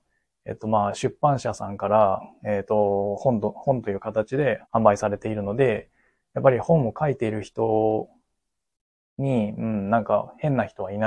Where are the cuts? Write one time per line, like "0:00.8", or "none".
0:04.6